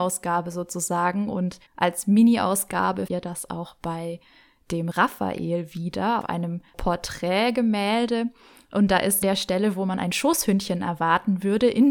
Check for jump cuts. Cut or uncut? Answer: cut